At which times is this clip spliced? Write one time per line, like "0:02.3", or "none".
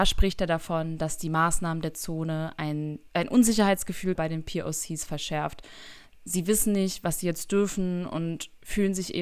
0:03.1
0:04.2